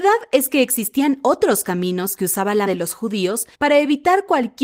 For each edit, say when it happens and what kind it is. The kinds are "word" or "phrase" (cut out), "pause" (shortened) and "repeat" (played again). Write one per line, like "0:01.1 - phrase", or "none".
0:02.7 - word
0:03.5 - pause